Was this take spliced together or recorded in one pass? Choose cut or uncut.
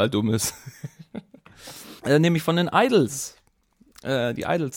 cut